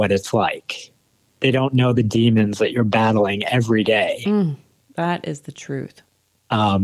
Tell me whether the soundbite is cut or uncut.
uncut